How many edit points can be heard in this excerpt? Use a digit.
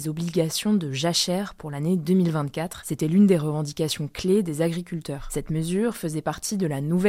0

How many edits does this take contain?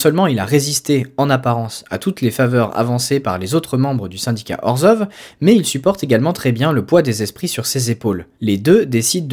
1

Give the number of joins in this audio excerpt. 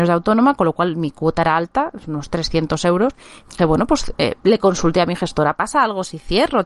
1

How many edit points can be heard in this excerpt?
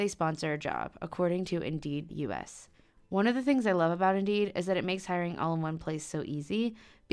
1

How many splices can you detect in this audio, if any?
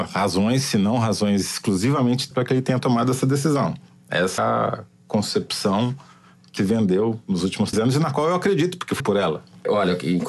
5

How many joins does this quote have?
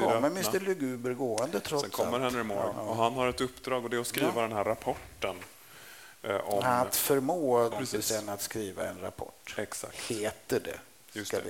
2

